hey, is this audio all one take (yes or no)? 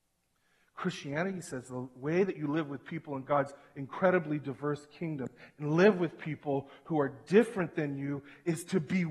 yes